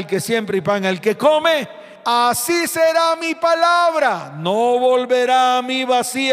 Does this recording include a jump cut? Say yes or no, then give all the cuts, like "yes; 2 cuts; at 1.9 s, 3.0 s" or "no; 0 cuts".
no; 0 cuts